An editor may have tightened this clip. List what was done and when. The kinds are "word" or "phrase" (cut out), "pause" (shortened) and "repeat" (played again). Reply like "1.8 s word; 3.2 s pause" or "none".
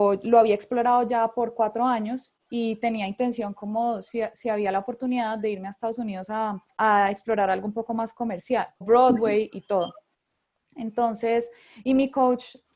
6.7 s pause; 8.8 s word